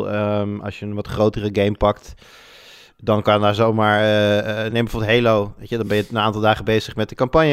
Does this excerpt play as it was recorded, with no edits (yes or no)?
yes